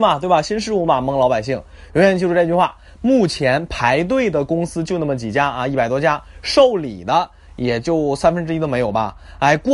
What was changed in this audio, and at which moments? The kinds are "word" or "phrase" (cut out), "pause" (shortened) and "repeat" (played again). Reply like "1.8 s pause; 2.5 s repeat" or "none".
none

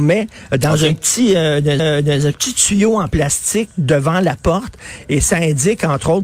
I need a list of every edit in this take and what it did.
1.8 s repeat

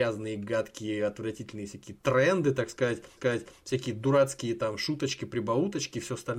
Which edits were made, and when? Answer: 3.2 s repeat

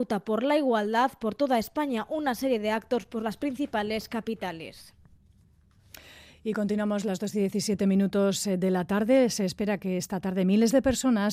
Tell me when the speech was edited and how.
none

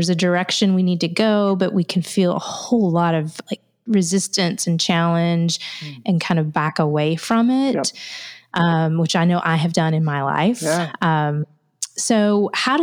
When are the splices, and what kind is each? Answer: none

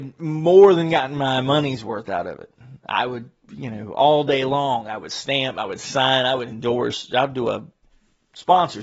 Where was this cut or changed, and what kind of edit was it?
none

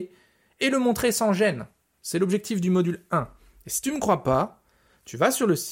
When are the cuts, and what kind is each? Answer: none

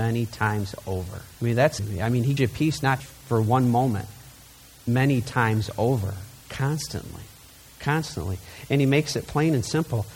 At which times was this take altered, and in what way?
1.3 s pause; 1.8 s word; 2.4 s word; 3.0 s word; 6.4 s pause

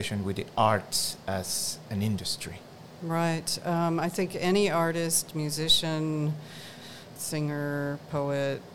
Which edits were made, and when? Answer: 7.2 s word

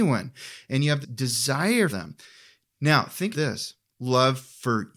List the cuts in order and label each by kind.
1.0 s word; 1.9 s word; 3.3 s word; 4.0 s word

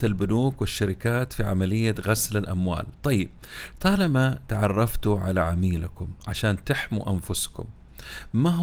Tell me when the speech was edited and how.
none

